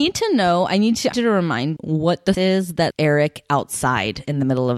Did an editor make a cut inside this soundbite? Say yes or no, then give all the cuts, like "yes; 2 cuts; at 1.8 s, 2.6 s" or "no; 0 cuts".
yes; 4 cuts; at 1.1 s, 1.8 s, 2.3 s, 2.9 s